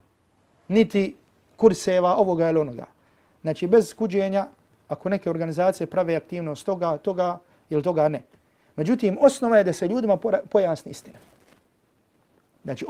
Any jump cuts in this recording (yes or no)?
no